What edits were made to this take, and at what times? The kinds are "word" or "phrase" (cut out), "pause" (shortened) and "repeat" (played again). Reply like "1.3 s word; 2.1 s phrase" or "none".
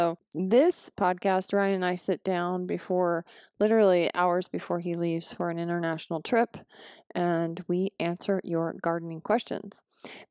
none